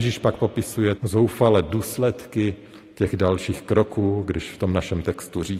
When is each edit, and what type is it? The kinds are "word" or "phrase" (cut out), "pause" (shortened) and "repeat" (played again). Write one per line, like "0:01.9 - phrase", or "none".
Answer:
0:01.0 - word